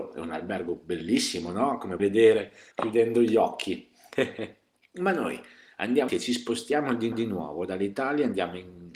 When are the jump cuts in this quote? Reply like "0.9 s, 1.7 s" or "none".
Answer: 2.0 s, 2.7 s, 6.1 s, 7.1 s